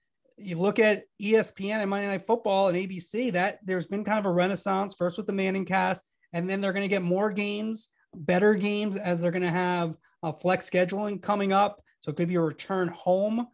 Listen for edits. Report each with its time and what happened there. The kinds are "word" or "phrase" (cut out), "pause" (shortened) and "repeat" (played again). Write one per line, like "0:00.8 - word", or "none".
none